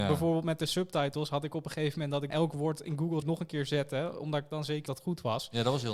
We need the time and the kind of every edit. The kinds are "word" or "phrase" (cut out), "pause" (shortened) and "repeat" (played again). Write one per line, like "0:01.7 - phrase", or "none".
0:02.3 - word
0:03.2 - word
0:04.9 - word